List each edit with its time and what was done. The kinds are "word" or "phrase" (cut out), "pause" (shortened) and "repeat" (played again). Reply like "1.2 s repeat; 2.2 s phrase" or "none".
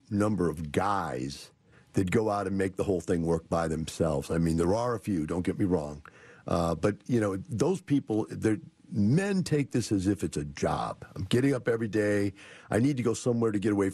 1.7 s pause